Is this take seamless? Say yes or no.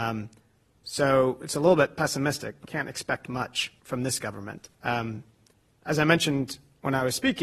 no